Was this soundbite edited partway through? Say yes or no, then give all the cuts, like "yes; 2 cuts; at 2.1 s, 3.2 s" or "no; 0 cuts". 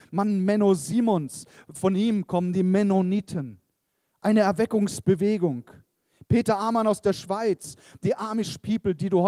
no; 0 cuts